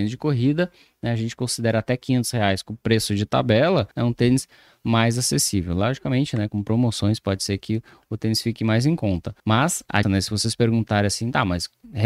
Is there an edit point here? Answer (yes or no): yes